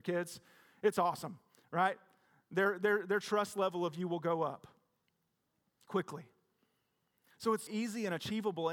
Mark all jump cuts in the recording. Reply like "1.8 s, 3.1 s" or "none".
7.7 s